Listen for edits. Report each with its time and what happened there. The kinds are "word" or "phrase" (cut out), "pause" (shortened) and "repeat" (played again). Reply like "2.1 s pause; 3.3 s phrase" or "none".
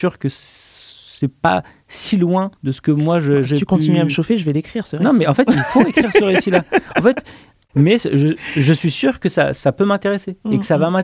2.6 s pause